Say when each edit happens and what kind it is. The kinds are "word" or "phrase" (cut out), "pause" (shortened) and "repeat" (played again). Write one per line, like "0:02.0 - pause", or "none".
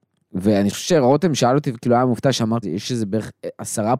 0:02.6 - word

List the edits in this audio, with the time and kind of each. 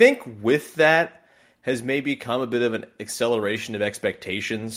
none

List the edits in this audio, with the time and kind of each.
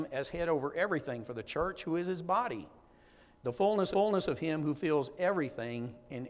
0:03.9 - repeat

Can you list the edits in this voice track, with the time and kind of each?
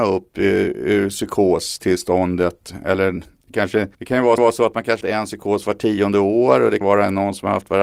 0:03.9 - pause
0:04.4 - repeat
0:05.0 - word
0:06.8 - word

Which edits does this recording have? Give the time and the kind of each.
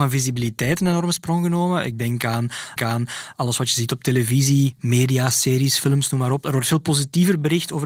0:02.8 - repeat

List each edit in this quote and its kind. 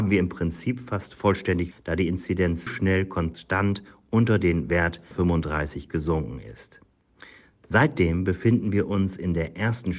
0:01.7 - word
0:02.7 - word
0:05.1 - word

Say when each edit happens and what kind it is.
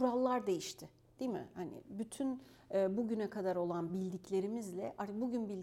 none

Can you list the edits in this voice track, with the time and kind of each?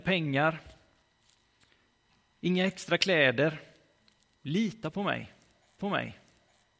0:05.8 - repeat

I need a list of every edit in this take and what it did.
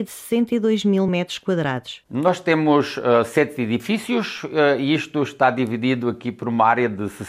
none

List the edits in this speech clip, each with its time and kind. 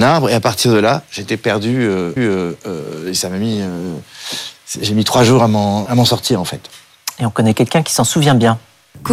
0:02.2 - repeat
0:05.9 - word

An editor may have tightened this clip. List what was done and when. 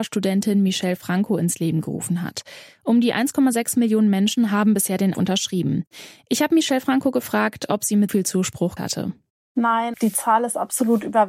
0:05.1 - word
0:08.1 - word
0:08.8 - word
0:09.9 - word

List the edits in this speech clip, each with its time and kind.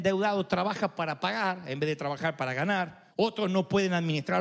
0:03.1 - pause

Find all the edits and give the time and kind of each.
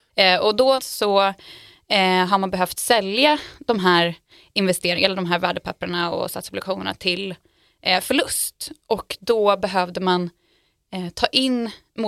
none

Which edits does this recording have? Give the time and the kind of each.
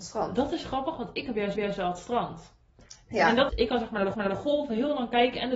0:01.5 - repeat
0:03.5 - word
0:04.1 - repeat

